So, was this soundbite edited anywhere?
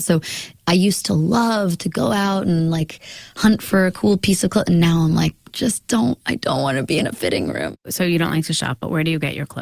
no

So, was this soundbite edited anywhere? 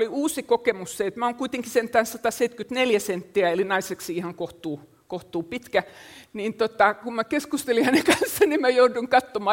no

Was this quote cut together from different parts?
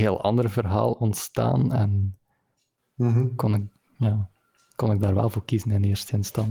no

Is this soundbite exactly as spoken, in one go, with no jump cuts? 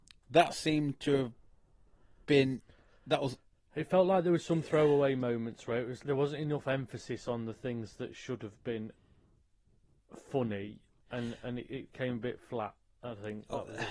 no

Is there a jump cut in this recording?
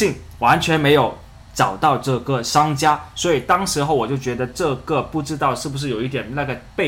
no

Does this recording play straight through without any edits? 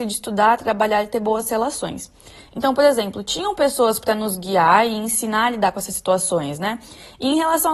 yes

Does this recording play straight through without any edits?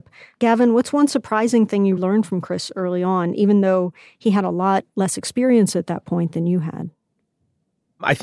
no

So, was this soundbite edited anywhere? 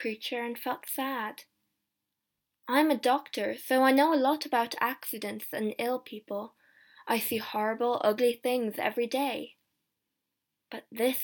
no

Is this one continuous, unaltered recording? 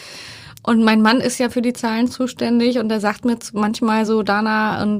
yes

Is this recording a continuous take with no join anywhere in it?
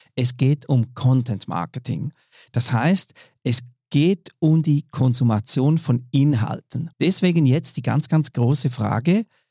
no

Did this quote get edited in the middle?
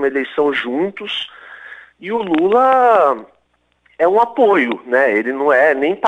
no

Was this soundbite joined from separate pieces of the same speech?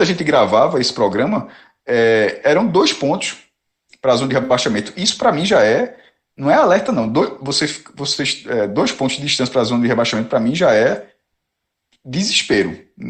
no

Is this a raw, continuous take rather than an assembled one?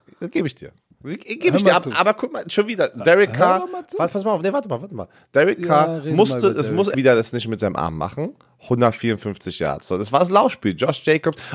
no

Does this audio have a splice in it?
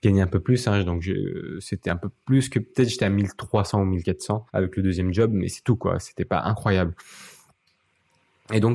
yes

